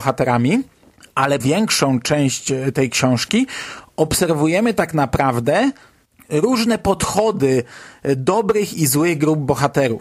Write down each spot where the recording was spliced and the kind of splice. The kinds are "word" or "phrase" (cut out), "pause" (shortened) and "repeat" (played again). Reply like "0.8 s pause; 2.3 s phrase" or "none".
1.4 s word